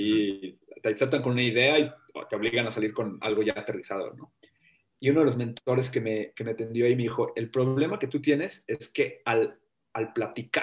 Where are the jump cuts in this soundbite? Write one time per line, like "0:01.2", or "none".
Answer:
none